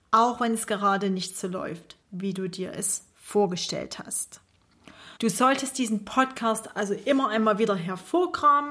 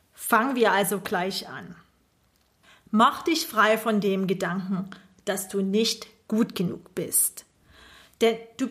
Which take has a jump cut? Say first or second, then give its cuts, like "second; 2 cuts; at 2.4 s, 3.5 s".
first; 2 cuts; at 2.0 s, 5.2 s